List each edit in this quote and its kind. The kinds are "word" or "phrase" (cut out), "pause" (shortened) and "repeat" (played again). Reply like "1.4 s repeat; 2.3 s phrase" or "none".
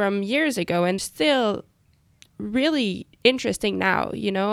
1.0 s phrase; 3.1 s pause